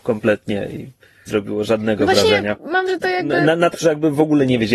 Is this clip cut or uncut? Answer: cut